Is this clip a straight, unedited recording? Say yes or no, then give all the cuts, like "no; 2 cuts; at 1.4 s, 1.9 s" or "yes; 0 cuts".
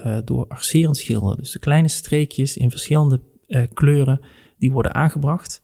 yes; 0 cuts